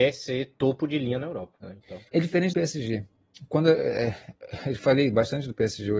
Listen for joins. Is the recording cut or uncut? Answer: cut